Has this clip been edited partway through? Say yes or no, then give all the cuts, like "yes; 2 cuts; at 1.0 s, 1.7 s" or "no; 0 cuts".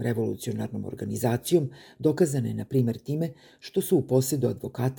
no; 0 cuts